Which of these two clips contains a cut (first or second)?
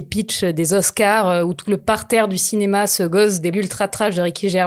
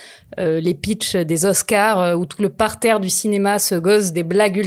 first